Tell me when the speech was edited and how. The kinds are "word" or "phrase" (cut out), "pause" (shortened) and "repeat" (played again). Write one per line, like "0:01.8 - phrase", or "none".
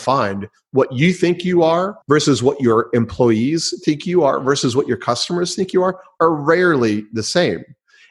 0:02.0 - pause

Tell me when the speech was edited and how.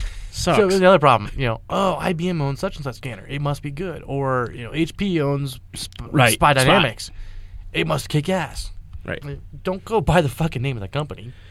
none

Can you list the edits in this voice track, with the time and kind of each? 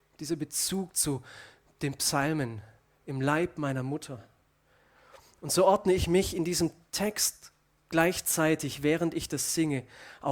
none

